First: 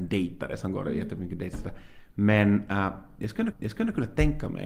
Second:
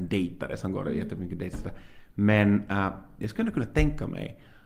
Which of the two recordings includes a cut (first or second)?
first